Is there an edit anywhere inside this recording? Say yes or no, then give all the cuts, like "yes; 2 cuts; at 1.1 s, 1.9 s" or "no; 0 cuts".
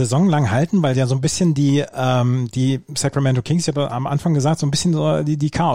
no; 0 cuts